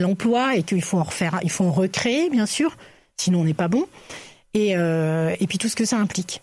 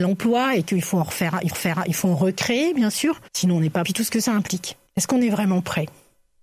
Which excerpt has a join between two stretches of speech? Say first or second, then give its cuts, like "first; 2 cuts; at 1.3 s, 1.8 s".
second; 4 cuts; at 1.5 s, 3.3 s, 3.8 s, 4.9 s